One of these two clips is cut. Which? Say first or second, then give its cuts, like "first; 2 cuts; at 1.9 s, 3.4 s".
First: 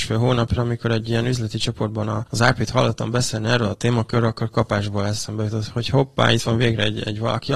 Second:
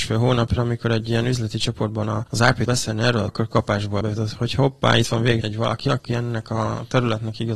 second; 4 cuts; at 2.7 s, 3.3 s, 4.0 s, 5.4 s